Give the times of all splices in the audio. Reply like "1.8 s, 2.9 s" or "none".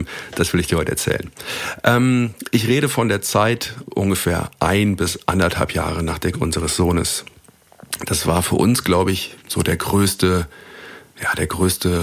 6.3 s, 9.4 s